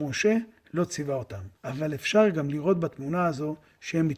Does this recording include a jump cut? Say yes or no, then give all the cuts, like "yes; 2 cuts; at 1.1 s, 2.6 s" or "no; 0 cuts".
yes; 1 cut; at 1.6 s